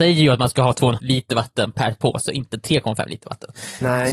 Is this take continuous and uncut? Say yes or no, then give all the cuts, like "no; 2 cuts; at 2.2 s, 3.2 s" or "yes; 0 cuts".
no; 1 cut; at 1.0 s